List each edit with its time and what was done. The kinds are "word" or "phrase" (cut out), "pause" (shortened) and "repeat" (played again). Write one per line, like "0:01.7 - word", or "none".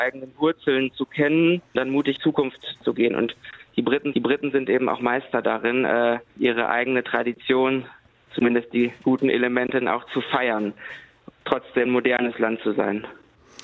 0:01.7 - word
0:02.2 - phrase
0:04.1 - repeat
0:06.3 - pause
0:09.8 - word
0:11.3 - word
0:11.9 - word